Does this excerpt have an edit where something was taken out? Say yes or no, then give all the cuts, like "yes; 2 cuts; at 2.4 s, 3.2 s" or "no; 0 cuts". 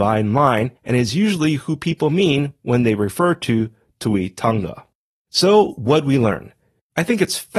no; 0 cuts